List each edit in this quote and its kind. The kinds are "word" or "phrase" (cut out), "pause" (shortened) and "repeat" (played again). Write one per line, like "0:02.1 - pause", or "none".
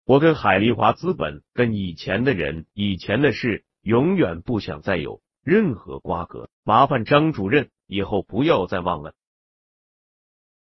0:01.5 - pause
0:02.7 - pause
0:06.5 - pause